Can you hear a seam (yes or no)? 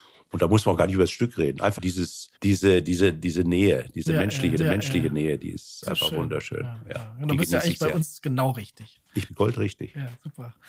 yes